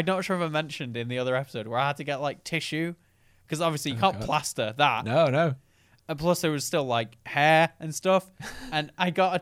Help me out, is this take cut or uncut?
uncut